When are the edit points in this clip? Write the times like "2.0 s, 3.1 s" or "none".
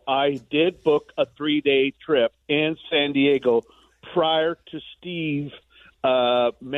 2.4 s